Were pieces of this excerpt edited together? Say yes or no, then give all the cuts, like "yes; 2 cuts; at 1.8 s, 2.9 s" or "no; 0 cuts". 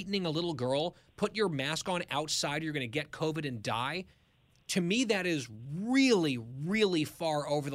no; 0 cuts